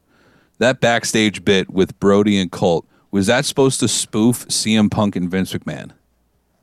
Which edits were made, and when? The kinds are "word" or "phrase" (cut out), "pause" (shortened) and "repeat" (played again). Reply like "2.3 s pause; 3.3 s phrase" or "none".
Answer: none